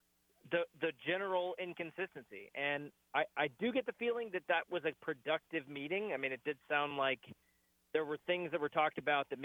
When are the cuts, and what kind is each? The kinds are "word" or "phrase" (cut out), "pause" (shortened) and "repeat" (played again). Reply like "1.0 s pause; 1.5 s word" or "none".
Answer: none